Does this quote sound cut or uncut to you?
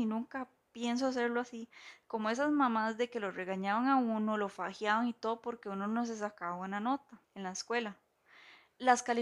cut